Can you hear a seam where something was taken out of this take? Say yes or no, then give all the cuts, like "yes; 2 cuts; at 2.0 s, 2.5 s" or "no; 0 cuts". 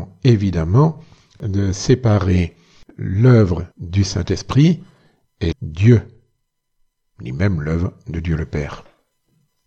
yes; 2 cuts; at 3.7 s, 5.5 s